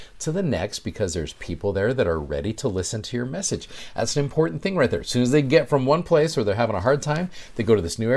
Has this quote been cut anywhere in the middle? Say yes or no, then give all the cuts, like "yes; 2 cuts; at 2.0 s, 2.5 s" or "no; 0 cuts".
no; 0 cuts